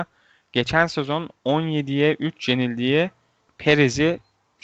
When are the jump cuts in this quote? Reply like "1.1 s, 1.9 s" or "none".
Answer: none